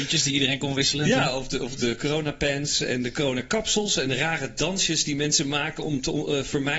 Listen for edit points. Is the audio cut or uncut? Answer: uncut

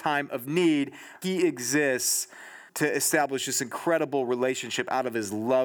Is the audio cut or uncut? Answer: cut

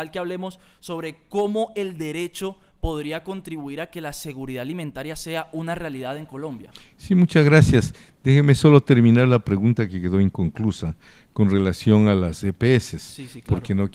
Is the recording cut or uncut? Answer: uncut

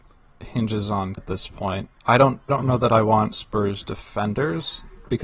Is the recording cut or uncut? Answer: cut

